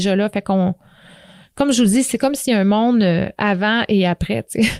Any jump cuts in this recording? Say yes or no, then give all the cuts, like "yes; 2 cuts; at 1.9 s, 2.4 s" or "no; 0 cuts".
no; 0 cuts